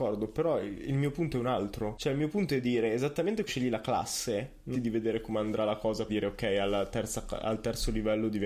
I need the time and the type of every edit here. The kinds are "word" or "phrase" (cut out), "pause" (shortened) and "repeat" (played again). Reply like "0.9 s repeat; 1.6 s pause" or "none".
3.5 s word; 4.7 s word; 6.1 s word